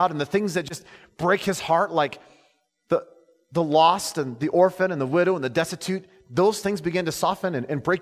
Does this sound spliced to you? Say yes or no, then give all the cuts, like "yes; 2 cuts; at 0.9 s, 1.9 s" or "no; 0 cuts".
no; 0 cuts